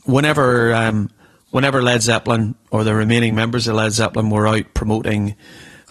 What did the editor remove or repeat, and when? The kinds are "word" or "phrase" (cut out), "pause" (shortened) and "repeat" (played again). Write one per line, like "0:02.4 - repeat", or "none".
none